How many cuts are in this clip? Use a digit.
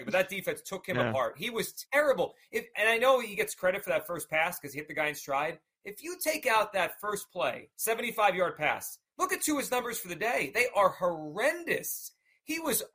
1